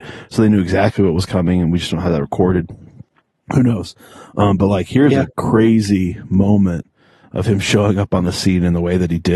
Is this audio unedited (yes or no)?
yes